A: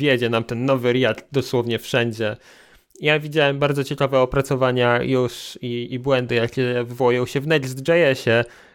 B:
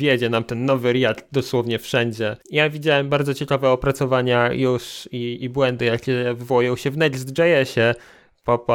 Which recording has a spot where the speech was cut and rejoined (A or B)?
B